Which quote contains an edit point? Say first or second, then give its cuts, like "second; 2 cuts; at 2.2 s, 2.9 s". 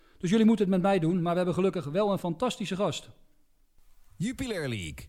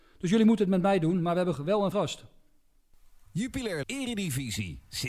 second; 3 cuts; at 1.5 s, 1.9 s, 3.8 s